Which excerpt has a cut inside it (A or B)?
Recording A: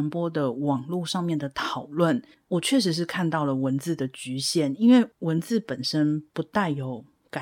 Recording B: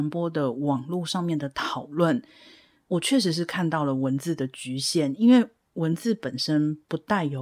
A